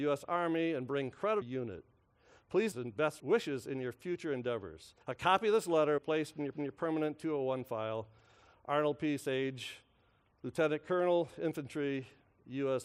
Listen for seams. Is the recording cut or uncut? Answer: cut